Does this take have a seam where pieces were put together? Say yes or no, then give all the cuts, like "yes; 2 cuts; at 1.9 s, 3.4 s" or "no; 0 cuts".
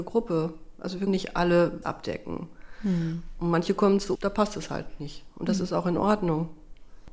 yes; 3 cuts; at 1.1 s, 1.8 s, 4.2 s